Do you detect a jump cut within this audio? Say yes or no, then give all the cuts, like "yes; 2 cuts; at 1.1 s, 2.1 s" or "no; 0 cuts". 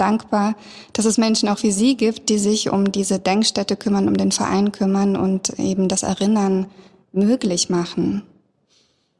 no; 0 cuts